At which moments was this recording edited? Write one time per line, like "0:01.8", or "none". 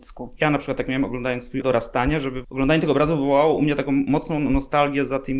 0:01.6
0:02.4